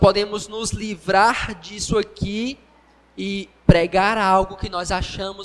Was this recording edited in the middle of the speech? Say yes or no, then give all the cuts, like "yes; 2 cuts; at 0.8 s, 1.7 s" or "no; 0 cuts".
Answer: no; 0 cuts